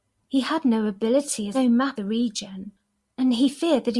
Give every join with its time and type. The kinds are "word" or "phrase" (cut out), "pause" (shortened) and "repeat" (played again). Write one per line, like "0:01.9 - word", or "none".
0:01.5 - phrase
0:02.0 - word